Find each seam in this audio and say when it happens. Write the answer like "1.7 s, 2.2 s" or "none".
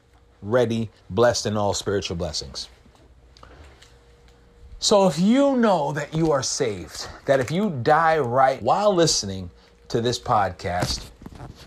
1.0 s, 8.6 s